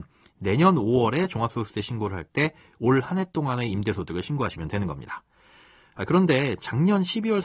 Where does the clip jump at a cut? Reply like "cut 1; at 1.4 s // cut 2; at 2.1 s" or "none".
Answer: none